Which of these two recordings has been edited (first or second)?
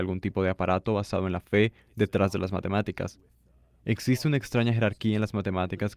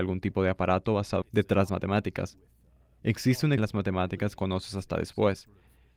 second